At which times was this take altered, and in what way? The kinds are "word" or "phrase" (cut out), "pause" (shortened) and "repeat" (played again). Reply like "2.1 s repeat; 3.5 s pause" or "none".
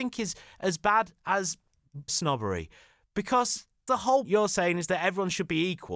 2.1 s word; 3.9 s word; 4.2 s word